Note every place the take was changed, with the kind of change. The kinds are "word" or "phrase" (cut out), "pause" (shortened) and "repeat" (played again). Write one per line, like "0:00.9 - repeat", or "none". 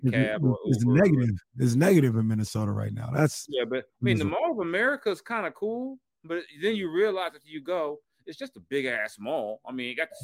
none